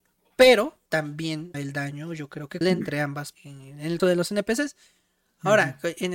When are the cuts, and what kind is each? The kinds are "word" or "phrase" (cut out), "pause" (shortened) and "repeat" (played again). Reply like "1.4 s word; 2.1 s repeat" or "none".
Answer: 1.5 s word; 2.6 s word; 3.3 s word; 4.0 s word